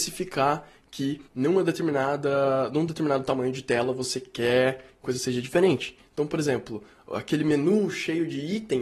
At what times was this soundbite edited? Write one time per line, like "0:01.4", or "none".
0:01.3
0:05.0